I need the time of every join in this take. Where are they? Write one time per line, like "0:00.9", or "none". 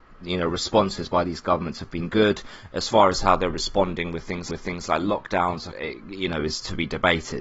0:04.5
0:05.7